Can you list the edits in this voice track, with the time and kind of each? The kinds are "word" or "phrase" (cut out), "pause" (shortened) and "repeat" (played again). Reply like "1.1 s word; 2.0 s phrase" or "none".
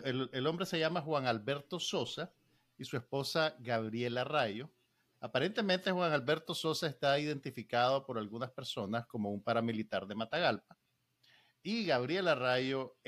none